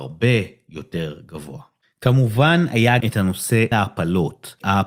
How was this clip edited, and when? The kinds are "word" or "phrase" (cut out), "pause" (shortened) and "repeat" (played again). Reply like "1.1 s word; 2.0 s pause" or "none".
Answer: 1.8 s pause; 3.0 s word; 3.7 s word